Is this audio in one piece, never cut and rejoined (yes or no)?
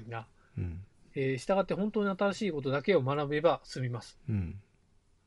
no